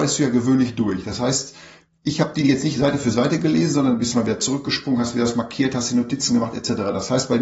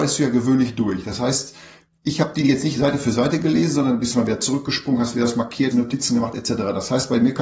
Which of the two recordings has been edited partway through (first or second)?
second